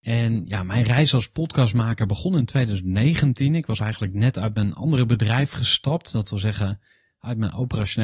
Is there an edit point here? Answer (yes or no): no